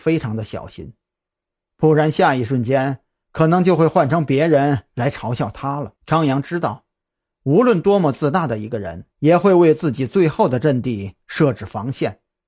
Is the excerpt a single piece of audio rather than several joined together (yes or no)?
no